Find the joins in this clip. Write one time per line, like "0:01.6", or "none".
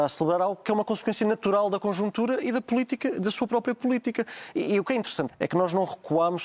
0:05.3